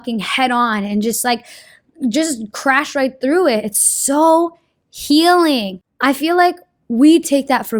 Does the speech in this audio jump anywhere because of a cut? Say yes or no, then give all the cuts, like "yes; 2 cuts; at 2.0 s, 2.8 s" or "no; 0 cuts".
no; 0 cuts